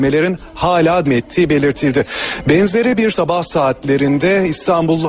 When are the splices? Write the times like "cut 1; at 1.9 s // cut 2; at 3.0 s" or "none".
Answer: cut 1; at 1.0 s // cut 2; at 3.1 s